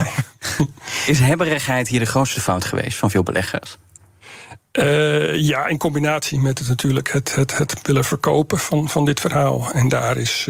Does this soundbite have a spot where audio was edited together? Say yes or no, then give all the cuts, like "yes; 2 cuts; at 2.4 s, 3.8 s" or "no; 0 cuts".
no; 0 cuts